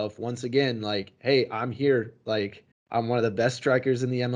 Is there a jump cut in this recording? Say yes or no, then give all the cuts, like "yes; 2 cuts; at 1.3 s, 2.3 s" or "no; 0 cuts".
yes; 1 cut; at 2.7 s